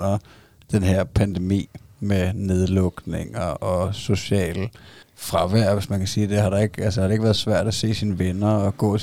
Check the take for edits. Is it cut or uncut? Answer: cut